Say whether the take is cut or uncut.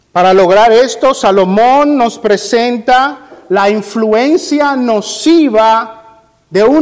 uncut